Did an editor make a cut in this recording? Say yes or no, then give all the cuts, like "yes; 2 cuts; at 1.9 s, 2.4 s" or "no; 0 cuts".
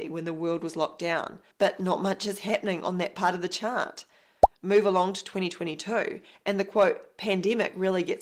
no; 0 cuts